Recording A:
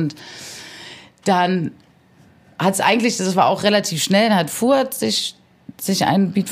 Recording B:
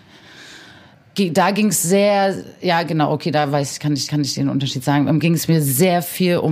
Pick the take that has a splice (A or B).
B